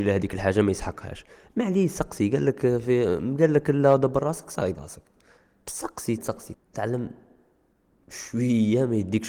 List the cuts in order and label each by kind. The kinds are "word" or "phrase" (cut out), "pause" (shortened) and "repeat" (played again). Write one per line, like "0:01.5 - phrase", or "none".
0:04.7 - word
0:06.2 - word
0:06.5 - word